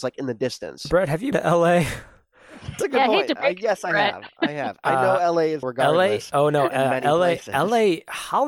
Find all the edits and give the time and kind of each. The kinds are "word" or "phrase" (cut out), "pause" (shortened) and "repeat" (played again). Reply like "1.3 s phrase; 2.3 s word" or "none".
1.3 s word; 2.8 s word; 5.6 s phrase